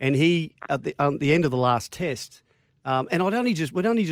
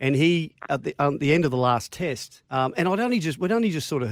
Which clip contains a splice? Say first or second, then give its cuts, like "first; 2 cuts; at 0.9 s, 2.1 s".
second; 1 cut; at 2.4 s